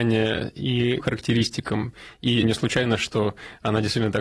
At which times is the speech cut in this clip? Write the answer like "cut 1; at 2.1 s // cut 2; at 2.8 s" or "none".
cut 1; at 1.0 s // cut 2; at 2.4 s